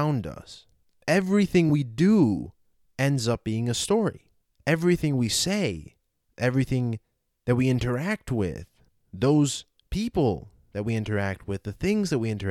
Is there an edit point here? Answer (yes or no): no